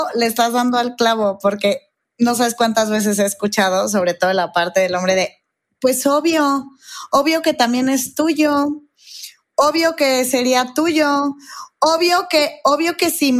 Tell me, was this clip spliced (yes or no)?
no